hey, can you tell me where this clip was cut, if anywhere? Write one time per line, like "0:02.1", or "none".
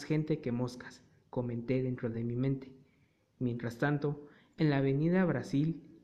none